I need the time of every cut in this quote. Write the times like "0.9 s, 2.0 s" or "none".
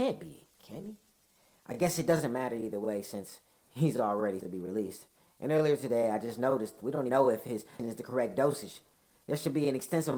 4.4 s, 7.1 s, 7.8 s